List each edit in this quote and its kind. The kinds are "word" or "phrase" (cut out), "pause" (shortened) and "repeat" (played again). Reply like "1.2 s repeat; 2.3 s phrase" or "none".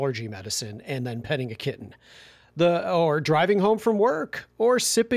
none